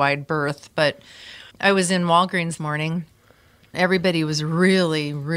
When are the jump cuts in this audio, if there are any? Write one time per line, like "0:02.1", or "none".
0:01.5
0:02.6
0:03.7